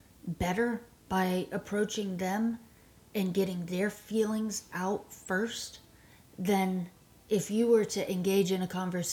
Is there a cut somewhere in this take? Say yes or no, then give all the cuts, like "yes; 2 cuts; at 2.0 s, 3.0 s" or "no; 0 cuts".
no; 0 cuts